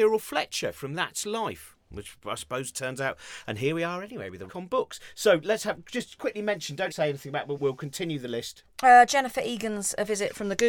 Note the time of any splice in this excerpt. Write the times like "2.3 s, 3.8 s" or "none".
4.5 s, 6.9 s, 7.6 s